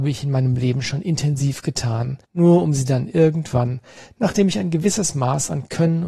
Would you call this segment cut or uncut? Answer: cut